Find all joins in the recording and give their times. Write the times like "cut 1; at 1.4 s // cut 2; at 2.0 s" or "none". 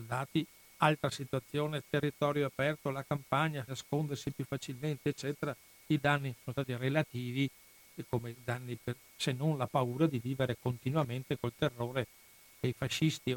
cut 1; at 3.7 s // cut 2; at 9.1 s